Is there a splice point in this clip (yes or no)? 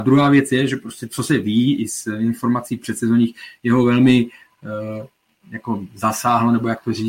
no